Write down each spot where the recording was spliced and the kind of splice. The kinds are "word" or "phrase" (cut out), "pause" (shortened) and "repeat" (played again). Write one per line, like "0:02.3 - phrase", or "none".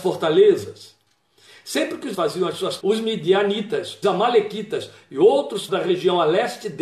0:02.1 - word
0:02.8 - word
0:04.0 - word
0:05.7 - word